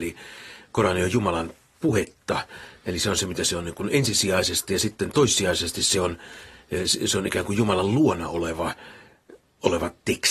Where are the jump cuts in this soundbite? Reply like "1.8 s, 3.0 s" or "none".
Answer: none